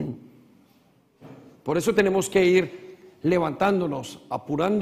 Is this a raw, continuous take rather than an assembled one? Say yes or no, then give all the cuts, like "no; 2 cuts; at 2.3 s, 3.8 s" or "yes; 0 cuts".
yes; 0 cuts